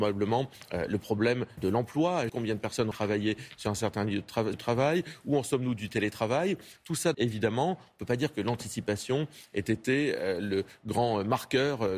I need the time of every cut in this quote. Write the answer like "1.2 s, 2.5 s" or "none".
1.6 s, 2.3 s, 2.9 s, 4.5 s, 7.1 s